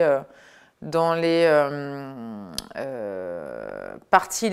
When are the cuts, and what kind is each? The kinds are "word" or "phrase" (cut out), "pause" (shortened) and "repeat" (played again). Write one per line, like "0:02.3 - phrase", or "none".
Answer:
none